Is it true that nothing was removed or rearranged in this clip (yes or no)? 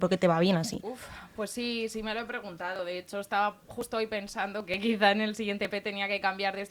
yes